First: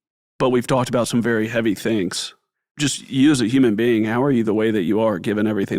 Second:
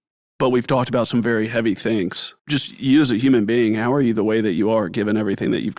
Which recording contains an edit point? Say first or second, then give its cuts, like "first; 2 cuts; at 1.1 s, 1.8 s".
second; 1 cut; at 2.4 s